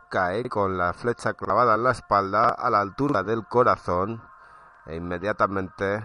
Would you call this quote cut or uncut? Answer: uncut